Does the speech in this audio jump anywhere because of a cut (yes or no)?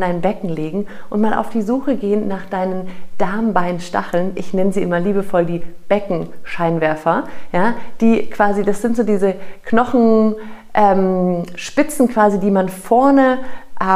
no